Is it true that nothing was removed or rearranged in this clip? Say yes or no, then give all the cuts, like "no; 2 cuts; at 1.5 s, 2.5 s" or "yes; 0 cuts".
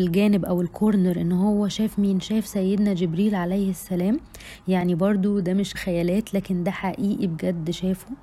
no; 1 cut; at 5.7 s